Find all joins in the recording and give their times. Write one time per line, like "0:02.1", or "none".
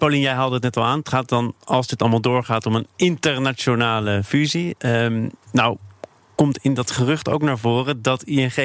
none